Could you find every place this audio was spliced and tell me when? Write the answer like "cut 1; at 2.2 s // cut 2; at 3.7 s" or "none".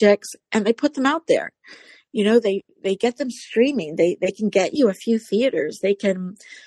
none